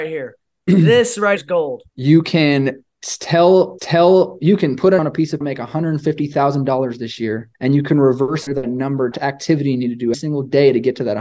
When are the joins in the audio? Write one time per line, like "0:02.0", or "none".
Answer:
0:01.4
0:01.9
0:03.8
0:05.0
0:05.4
0:07.5
0:08.5
0:09.1
0:10.1